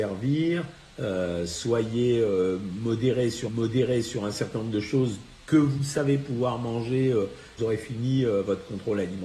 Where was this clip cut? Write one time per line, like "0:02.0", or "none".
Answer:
0:03.5
0:07.6